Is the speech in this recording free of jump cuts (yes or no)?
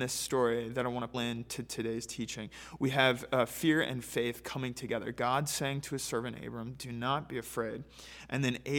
no